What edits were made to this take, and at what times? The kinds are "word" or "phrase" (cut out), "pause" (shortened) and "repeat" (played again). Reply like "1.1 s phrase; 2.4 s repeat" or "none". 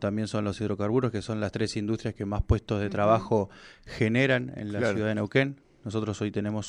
none